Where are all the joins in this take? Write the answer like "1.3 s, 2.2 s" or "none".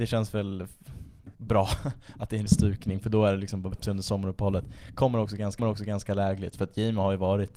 1.3 s, 2.5 s, 3.7 s, 5.6 s